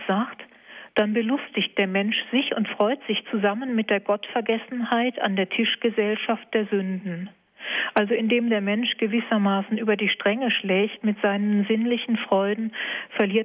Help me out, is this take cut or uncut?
uncut